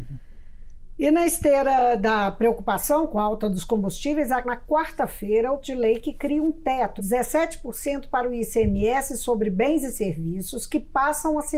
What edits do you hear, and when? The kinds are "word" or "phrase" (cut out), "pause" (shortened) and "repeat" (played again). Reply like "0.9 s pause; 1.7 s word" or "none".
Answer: 4.4 s phrase; 5.6 s word; 7.0 s word